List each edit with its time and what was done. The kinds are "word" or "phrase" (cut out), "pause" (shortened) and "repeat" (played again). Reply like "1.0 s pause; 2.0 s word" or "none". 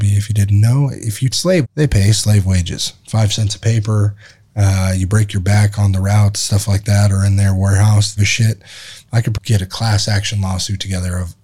1.3 s phrase; 1.6 s word; 8.2 s phrase; 9.3 s word